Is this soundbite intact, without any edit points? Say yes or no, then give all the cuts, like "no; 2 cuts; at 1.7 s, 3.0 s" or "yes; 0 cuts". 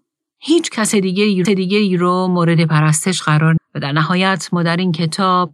no; 2 cuts; at 1.4 s, 3.6 s